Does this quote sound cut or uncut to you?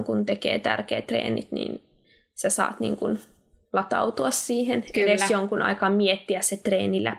uncut